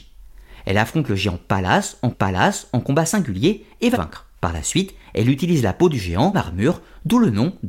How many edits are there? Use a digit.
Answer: 4